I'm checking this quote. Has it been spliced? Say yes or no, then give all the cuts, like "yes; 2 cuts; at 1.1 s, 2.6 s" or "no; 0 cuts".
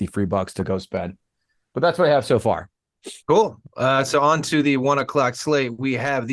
yes; 1 cut; at 3.2 s